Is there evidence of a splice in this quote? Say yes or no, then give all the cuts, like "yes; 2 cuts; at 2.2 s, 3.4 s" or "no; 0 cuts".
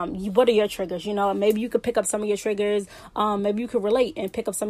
no; 0 cuts